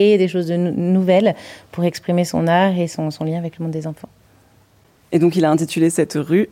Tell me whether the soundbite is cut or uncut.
uncut